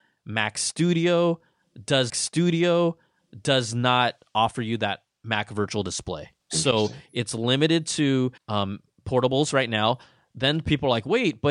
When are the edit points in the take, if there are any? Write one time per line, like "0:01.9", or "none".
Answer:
0:02.1
0:06.4
0:08.4